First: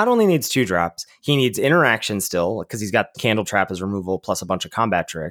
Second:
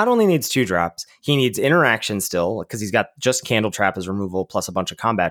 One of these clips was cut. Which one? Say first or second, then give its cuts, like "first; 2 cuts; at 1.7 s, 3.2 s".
first; 1 cut; at 3.1 s